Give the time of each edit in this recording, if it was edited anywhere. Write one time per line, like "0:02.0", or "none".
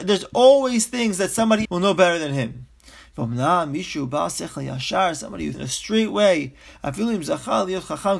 0:01.6
0:05.5